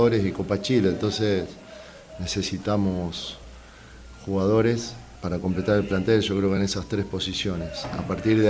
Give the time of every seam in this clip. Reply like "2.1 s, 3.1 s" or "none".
none